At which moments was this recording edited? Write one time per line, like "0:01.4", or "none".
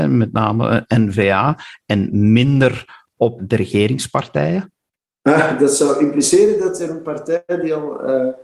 0:03.4